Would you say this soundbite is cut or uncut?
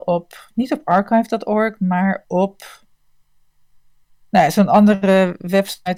uncut